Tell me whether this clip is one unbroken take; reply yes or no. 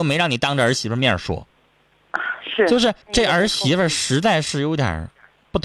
no